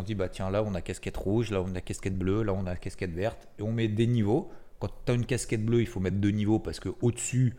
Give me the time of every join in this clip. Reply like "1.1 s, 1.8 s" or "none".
none